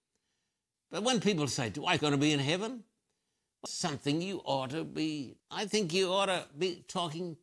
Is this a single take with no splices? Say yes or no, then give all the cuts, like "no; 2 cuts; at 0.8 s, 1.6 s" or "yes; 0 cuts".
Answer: no; 3 cuts; at 2.0 s, 3.7 s, 5.4 s